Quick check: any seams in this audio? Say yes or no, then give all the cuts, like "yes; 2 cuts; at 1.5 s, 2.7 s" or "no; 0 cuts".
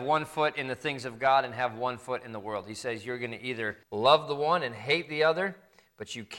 yes; 1 cut; at 3.8 s